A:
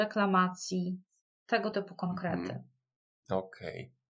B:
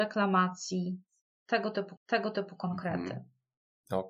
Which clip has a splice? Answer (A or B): B